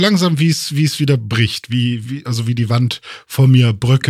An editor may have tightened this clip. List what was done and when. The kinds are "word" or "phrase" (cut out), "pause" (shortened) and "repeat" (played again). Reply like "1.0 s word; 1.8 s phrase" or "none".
2.0 s word